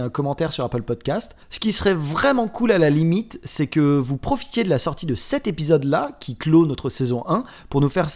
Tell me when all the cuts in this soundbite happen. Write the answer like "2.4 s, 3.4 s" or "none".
1.4 s